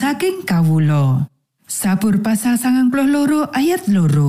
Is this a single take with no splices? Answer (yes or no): yes